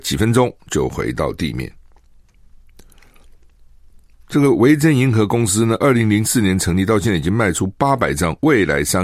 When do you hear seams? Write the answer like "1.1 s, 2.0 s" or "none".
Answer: none